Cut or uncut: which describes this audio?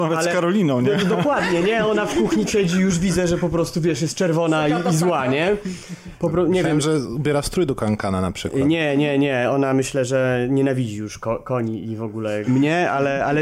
cut